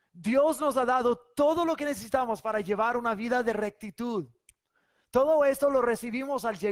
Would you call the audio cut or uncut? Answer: uncut